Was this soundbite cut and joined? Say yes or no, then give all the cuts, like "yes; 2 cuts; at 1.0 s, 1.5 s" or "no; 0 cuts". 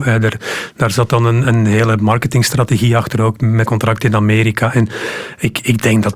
yes; 2 cuts; at 1.4 s, 3.7 s